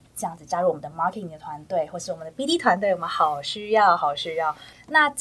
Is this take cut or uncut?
uncut